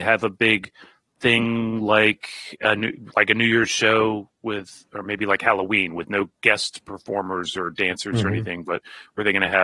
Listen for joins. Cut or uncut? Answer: uncut